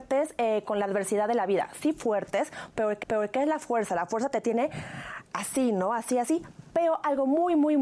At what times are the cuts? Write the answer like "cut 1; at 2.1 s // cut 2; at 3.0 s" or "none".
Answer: cut 1; at 3.0 s

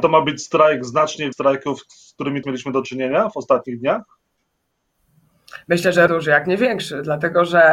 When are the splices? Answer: cut 1; at 1.3 s // cut 2; at 2.4 s // cut 3; at 6.1 s

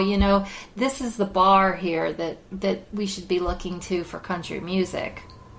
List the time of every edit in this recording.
none

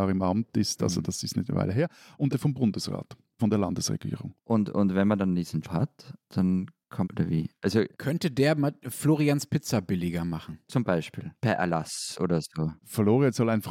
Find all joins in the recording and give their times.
cut 1; at 2.3 s // cut 2; at 3.4 s // cut 3; at 5.6 s // cut 4; at 7.0 s // cut 5; at 11.4 s

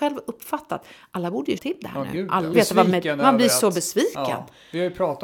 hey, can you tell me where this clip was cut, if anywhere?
cut 1; at 1.6 s // cut 2; at 2.5 s

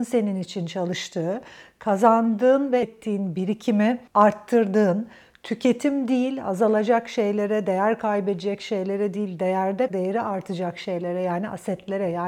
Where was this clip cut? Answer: cut 1; at 2.8 s // cut 2; at 4.1 s // cut 3; at 9.9 s

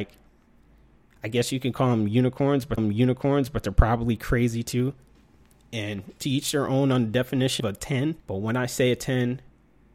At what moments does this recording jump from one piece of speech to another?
cut 1; at 2.8 s // cut 2; at 6.2 s // cut 3; at 7.6 s // cut 4; at 8.2 s

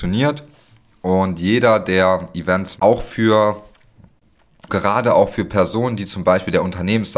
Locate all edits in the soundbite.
cut 1; at 2.8 s // cut 2; at 4.7 s

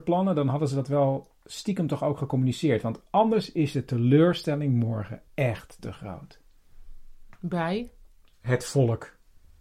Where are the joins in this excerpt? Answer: cut 1; at 5.3 s

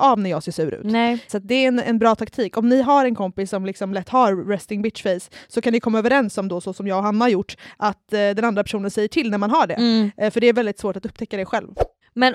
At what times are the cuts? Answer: none

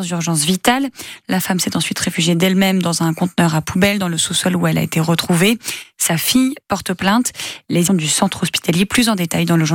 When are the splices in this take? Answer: cut 1; at 7.9 s

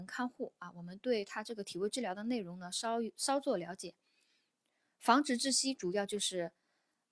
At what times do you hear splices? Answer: none

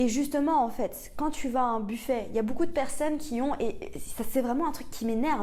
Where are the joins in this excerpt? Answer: none

